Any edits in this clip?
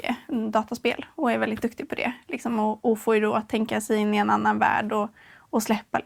no; 0 cuts

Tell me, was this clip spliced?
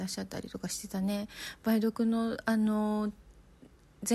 no; 0 cuts

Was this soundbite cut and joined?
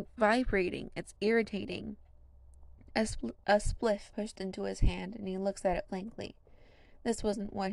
yes; 1 cut; at 4.1 s

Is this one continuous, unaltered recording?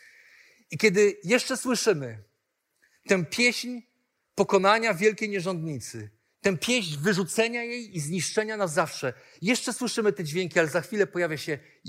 yes; 0 cuts

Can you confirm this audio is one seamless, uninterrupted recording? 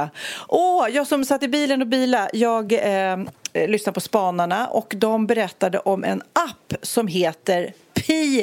yes; 0 cuts

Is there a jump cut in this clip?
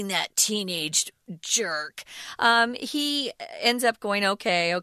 no; 0 cuts

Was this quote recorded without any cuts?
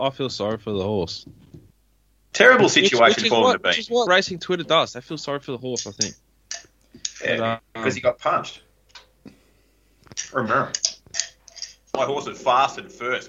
no; 2 cuts; at 4.1 s, 11.9 s

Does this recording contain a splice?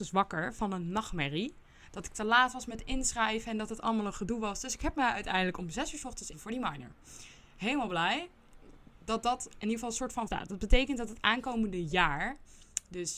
yes; 2 cuts; at 6.3 s, 10.3 s

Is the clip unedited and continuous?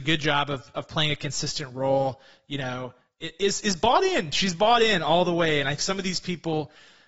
no; 1 cut; at 5.8 s

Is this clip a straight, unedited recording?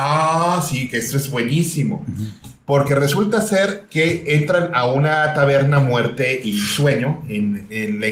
yes; 0 cuts

